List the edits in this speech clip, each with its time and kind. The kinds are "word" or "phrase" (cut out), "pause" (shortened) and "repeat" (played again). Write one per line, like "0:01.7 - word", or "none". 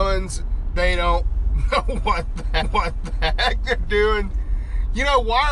0:02.6 - repeat